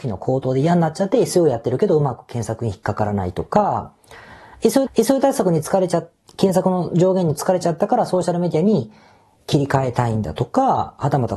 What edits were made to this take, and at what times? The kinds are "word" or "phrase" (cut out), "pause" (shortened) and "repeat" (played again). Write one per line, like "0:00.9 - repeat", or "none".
0:04.9 - repeat